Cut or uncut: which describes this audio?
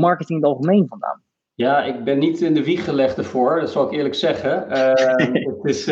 uncut